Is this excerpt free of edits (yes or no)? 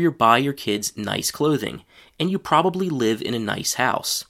yes